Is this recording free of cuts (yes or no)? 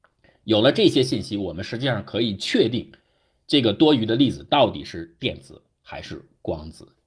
yes